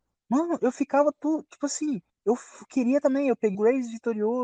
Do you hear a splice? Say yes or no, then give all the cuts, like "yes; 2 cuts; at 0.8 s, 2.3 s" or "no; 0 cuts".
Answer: yes; 3 cuts; at 2.1 s, 3.0 s, 3.5 s